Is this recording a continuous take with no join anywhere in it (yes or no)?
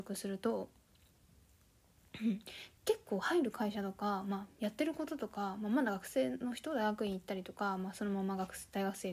no